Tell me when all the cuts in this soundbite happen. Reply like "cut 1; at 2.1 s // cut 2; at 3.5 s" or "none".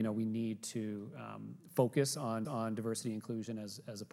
cut 1; at 2.4 s